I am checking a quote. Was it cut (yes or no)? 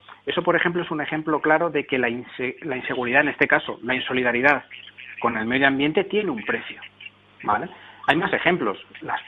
no